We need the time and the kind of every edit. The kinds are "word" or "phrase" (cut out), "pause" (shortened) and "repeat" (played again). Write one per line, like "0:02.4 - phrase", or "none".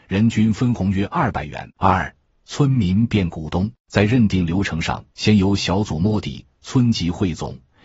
0:01.7 - pause
0:03.8 - pause
0:05.1 - pause